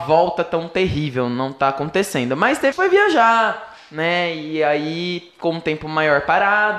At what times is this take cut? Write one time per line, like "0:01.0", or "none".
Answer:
0:02.7